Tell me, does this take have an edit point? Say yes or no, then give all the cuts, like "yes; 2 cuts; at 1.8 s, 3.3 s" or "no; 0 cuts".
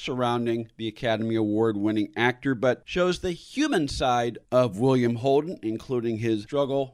no; 0 cuts